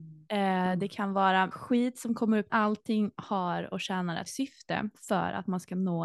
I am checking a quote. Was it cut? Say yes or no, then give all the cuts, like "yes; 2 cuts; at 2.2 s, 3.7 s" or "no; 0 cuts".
yes; 3 cuts; at 1.5 s, 2.5 s, 4.3 s